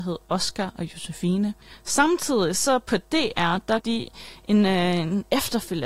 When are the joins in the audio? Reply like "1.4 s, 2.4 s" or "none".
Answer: 1.6 s, 3.8 s